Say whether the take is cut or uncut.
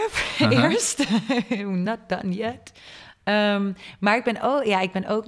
uncut